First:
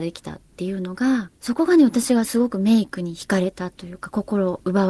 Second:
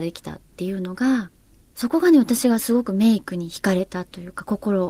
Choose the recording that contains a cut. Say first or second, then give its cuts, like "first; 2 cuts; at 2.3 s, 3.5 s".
first; 1 cut; at 1.4 s